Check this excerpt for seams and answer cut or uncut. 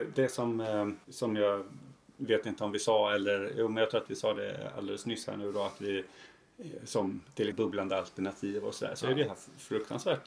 cut